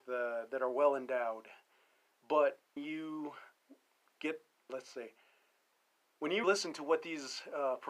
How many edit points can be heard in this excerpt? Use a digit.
3